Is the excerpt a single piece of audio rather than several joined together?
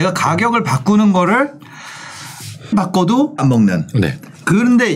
no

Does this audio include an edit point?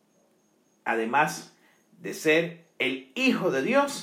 no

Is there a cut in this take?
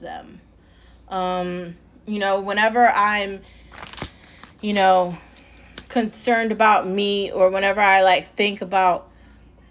yes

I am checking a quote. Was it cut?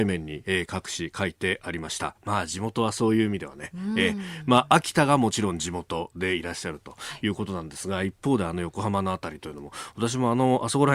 no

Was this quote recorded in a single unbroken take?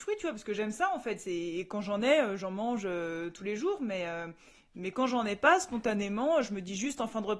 yes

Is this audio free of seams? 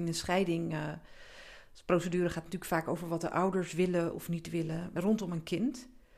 yes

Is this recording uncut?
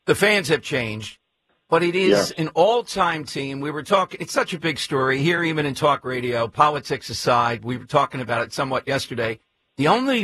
yes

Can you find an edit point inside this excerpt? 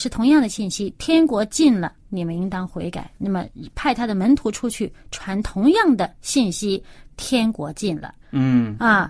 yes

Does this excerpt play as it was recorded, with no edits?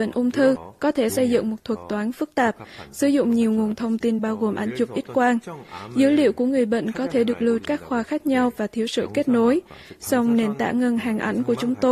no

